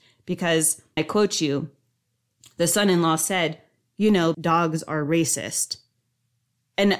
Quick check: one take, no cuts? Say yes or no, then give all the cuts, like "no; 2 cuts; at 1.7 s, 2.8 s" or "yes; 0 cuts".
no; 2 cuts; at 1.0 s, 4.3 s